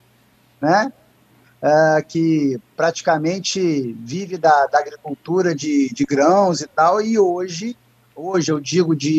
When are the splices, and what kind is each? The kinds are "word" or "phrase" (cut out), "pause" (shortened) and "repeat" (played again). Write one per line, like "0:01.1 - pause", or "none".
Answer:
none